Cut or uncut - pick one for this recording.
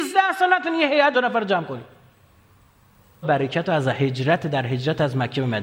cut